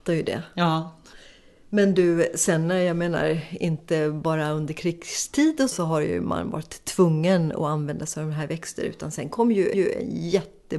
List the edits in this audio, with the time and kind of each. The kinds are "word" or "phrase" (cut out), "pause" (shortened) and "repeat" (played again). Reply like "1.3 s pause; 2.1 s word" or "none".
5.7 s word; 9.7 s repeat